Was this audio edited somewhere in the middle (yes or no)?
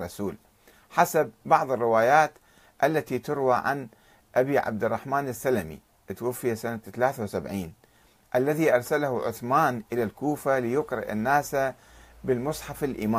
no